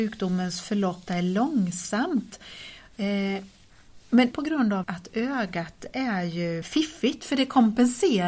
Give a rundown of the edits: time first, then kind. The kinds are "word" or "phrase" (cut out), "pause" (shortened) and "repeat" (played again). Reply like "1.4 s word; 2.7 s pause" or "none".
1.1 s word; 4.3 s word; 4.8 s word; 6.6 s word